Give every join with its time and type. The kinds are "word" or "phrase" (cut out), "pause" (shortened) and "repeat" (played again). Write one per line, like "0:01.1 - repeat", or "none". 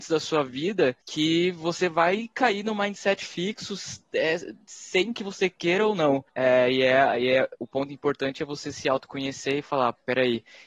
0:01.0 - pause
0:04.6 - pause
0:06.3 - pause